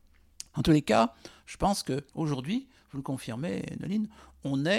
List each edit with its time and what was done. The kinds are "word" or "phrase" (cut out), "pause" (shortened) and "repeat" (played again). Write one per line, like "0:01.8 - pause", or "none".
0:02.1 - pause